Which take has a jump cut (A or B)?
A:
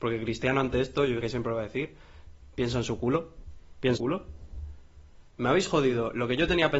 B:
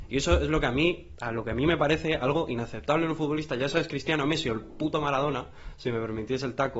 A